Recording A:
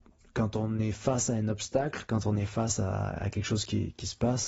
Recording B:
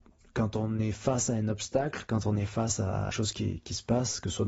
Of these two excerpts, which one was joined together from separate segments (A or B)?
B